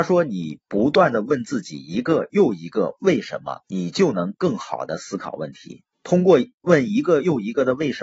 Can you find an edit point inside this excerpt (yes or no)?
yes